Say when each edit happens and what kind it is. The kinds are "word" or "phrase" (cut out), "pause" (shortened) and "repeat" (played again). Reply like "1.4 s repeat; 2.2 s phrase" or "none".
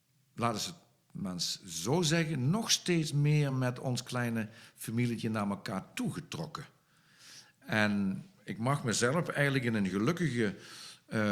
none